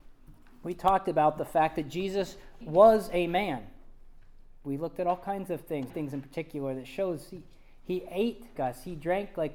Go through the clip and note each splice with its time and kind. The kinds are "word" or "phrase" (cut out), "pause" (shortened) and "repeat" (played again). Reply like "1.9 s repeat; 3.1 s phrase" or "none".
2.6 s word; 5.9 s word; 8.5 s word